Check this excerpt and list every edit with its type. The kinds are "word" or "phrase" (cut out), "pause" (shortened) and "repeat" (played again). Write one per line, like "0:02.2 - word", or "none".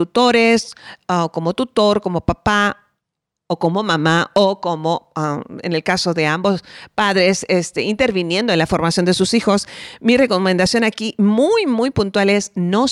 none